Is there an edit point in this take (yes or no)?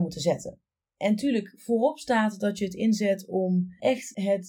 no